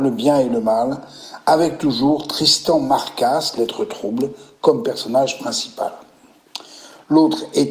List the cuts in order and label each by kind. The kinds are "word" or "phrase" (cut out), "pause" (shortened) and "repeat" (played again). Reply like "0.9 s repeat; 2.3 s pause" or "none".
none